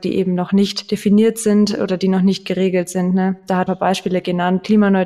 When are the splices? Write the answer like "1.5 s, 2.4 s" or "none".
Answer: 3.7 s